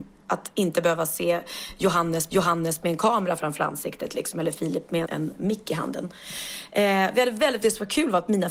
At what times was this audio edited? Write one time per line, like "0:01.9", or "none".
0:02.3
0:05.0
0:07.6